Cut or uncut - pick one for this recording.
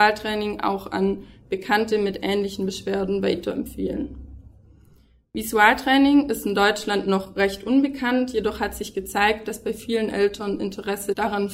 uncut